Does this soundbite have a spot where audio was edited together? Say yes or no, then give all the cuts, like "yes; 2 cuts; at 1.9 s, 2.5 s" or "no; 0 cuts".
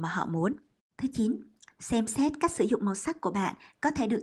yes; 1 cut; at 1.6 s